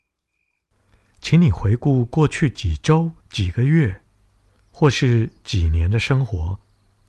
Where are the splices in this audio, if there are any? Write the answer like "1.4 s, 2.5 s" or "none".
3.2 s